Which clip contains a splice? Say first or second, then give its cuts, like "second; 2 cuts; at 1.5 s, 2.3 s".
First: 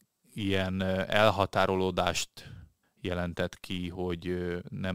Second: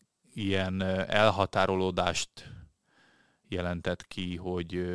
first; 1 cut; at 2.8 s